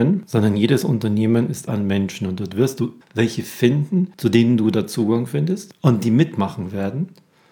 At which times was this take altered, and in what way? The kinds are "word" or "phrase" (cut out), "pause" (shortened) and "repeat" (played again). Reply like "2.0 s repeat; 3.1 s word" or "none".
1.7 s phrase; 3.0 s word